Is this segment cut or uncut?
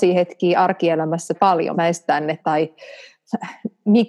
cut